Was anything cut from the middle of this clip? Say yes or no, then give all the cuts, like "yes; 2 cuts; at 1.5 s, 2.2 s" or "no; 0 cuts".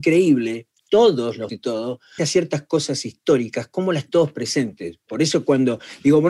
yes; 3 cuts; at 1.5 s, 2.2 s, 4.1 s